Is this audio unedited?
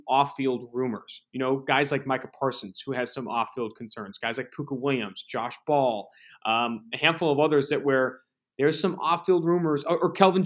yes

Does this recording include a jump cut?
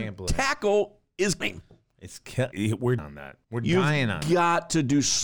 yes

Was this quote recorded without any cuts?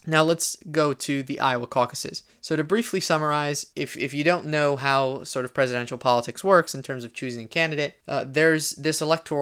no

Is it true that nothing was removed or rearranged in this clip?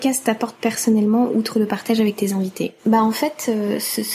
no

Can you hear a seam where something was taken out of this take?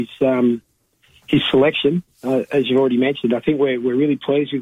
no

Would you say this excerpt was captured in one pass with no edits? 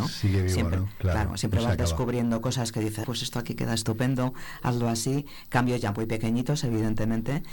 no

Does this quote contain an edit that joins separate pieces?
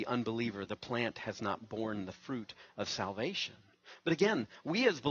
no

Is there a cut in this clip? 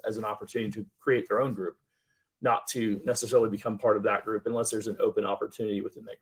no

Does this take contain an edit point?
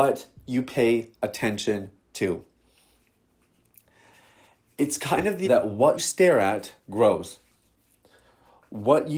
yes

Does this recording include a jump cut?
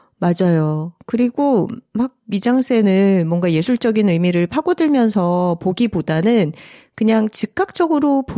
no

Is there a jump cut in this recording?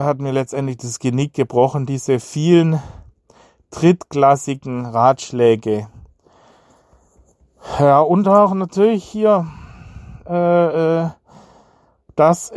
no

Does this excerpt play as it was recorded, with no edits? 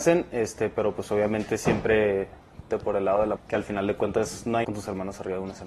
no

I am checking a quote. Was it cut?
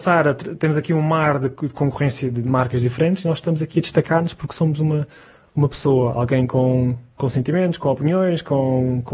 no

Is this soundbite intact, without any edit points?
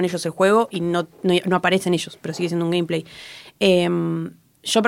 yes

